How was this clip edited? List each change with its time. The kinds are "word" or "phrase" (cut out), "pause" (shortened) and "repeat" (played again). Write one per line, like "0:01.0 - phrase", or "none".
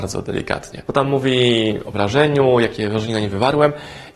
0:01.9 - word